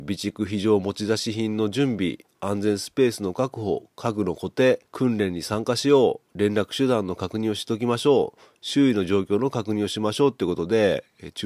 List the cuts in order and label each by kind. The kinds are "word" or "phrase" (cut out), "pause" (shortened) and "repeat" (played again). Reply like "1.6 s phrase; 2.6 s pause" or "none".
4.9 s pause; 6.3 s pause